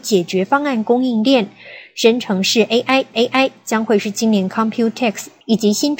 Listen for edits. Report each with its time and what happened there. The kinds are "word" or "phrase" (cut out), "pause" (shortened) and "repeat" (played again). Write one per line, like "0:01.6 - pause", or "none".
0:03.1 - repeat